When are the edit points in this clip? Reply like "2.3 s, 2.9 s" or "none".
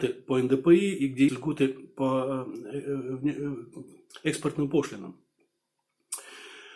1.3 s